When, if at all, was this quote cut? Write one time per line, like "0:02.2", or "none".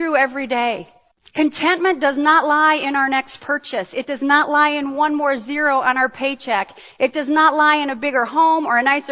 0:01.1